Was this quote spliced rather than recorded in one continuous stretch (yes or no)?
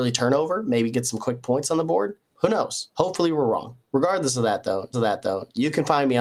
yes